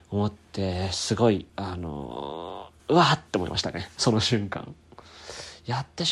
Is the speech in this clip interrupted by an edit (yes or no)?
yes